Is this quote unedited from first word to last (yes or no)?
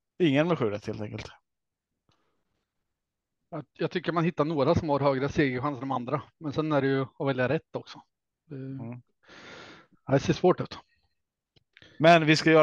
yes